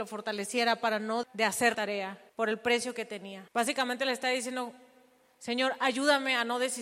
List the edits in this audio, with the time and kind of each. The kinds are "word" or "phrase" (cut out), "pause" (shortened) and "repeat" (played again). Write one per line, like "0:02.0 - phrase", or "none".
0:01.2 - word
0:01.7 - word
0:02.3 - pause
0:03.5 - pause